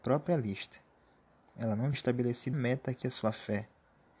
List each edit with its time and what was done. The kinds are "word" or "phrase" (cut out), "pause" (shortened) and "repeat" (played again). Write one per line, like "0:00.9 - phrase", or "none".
0:01.9 - word
0:02.5 - word
0:03.0 - word